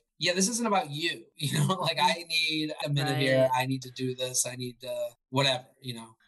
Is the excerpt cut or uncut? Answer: cut